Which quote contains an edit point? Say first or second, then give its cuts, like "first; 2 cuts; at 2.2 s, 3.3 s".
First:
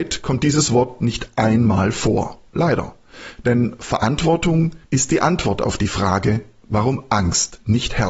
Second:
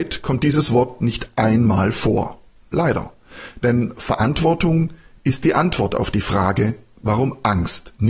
first; 2 cuts; at 2.5 s, 4.8 s